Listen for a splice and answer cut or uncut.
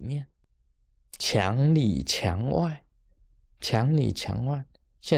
cut